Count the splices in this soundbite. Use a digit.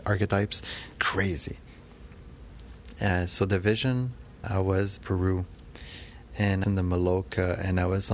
4